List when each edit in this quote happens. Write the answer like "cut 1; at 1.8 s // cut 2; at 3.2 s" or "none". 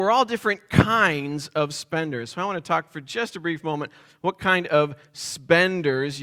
none

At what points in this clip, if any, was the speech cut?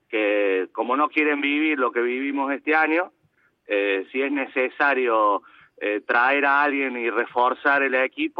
none

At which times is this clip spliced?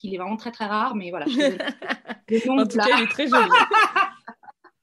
none

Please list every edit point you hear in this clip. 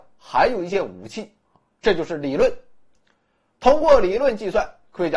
none

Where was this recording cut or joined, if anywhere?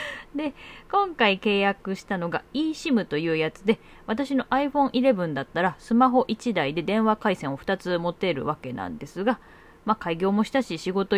none

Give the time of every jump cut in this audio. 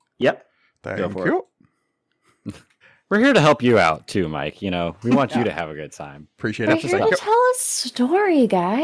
cut 1; at 2.8 s

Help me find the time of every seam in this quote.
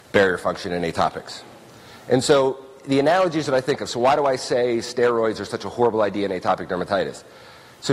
none

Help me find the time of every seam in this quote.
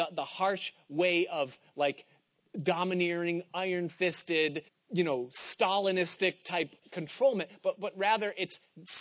cut 1; at 4.7 s // cut 2; at 6.8 s

